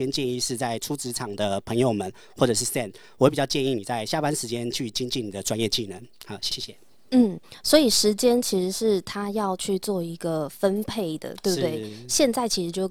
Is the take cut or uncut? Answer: uncut